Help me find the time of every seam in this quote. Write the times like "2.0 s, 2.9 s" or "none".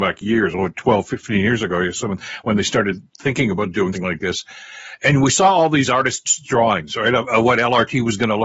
3.9 s

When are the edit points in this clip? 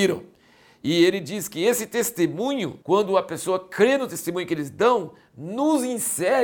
2.8 s

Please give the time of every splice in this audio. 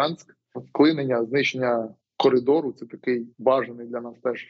3.3 s

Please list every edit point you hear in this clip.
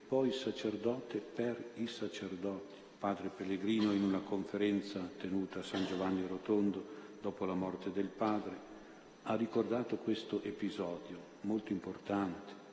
3.0 s

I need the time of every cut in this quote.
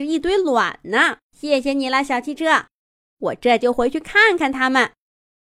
1.2 s

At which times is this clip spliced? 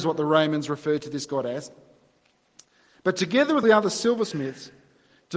3.6 s

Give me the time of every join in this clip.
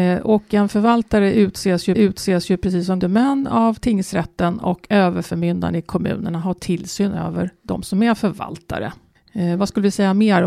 1.9 s, 3.0 s, 9.1 s

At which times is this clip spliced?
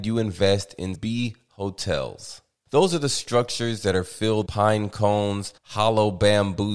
0.9 s, 4.5 s, 5.6 s

